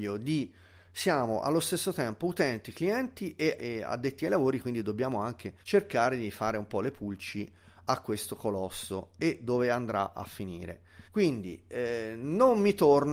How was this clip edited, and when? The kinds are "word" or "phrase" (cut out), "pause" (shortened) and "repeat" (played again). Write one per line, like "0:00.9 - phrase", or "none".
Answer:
0:03.6 - word
0:05.6 - pause
0:11.1 - pause